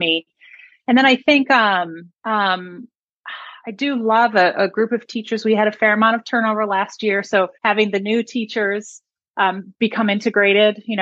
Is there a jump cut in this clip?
yes; 3 cuts; at 2.2 s, 7.5 s, 9.7 s

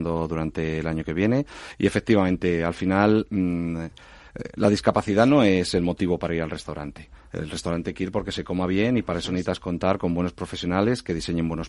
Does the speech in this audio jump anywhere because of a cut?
no; 0 cuts

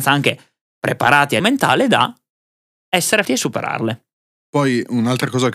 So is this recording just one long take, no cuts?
no; 2 cuts; at 1.4 s, 3.2 s

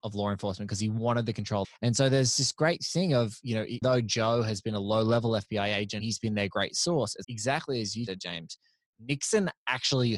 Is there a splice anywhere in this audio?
yes; 5 cuts; at 1.6 s, 3.8 s, 6.0 s, 7.2 s, 8.1 s

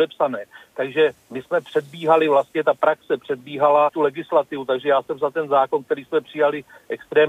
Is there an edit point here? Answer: yes; 1 cut; at 3.9 s

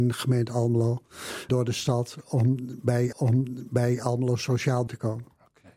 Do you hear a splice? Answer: yes; 3 cuts; at 1.5 s, 3.1 s, 4.9 s

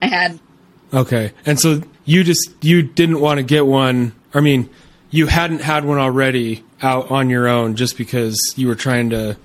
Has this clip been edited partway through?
yes; 1 cut; at 1.9 s

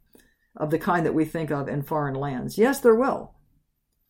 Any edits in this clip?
no; 0 cuts

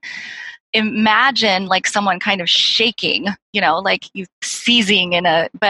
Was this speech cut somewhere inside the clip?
no; 0 cuts

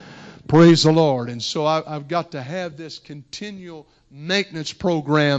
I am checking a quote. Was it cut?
no; 0 cuts

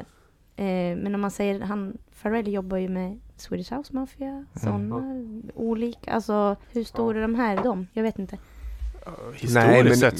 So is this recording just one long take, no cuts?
no; 3 cuts; at 3.3 s, 6.6 s, 7.6 s

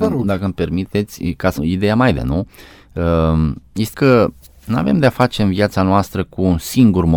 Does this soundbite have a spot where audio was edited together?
yes; 3 cuts; at 1.6 s, 2.1 s, 3.9 s

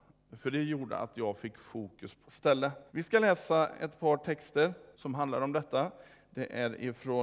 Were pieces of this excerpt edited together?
yes; 3 cuts; at 2.2 s, 2.9 s, 4.9 s

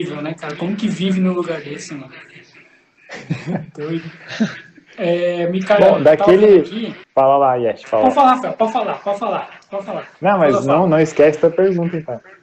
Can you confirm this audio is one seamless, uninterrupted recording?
no; 2 cuts; at 7.0 s, 10.1 s

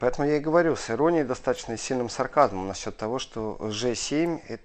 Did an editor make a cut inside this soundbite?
no; 0 cuts

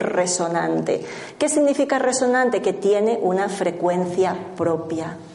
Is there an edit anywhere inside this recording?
no; 0 cuts

